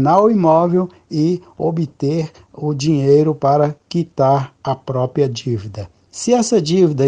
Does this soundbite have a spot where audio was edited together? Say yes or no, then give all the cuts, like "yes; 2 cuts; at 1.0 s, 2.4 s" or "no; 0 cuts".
no; 0 cuts